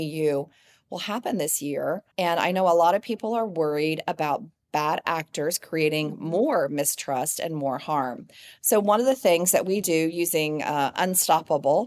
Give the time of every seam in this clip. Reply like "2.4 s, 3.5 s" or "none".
2.1 s